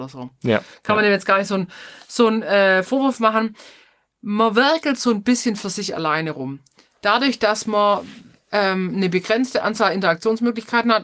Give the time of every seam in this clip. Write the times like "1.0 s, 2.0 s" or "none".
none